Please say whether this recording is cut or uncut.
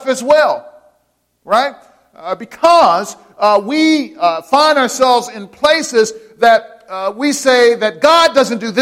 uncut